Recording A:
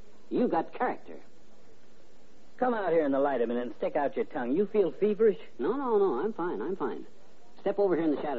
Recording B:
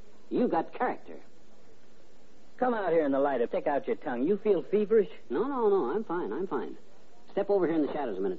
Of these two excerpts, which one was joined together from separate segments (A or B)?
B